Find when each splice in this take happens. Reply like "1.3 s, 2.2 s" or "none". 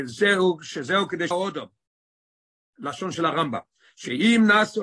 1.3 s